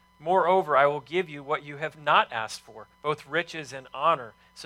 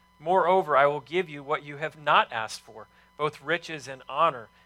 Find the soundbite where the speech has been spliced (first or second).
first